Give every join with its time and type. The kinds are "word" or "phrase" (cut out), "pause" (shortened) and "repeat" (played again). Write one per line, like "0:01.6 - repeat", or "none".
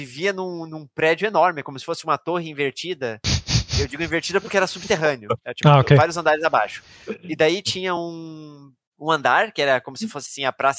none